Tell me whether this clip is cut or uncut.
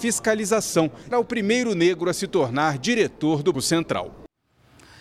cut